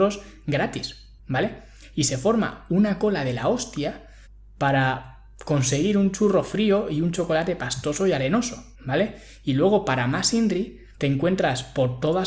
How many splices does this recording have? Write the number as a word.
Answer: four